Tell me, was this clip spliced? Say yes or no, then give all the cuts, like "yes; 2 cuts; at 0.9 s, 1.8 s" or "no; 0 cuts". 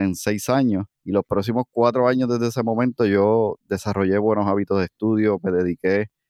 yes; 1 cut; at 0.9 s